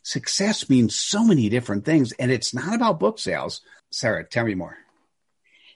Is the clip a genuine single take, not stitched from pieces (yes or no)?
no